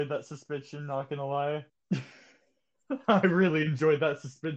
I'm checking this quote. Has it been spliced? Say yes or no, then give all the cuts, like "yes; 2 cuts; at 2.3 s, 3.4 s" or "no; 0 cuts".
yes; 1 cut; at 1.7 s